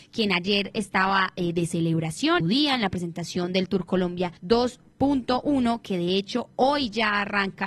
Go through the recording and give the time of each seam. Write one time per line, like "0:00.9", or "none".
0:02.4
0:04.4